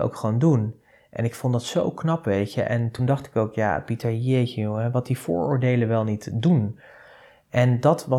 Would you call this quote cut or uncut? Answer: uncut